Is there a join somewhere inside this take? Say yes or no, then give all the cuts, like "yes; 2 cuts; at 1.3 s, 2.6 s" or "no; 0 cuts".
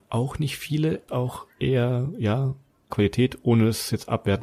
yes; 2 cuts; at 1.1 s, 2.9 s